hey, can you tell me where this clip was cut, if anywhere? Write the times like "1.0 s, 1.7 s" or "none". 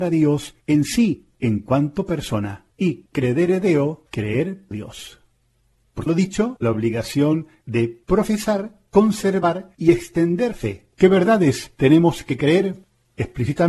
2.7 s, 4.7 s, 6.1 s, 6.6 s, 8.0 s, 10.5 s, 10.9 s